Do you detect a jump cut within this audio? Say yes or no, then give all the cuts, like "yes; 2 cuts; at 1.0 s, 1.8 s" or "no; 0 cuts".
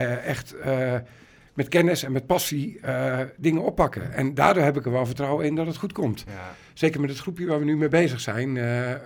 no; 0 cuts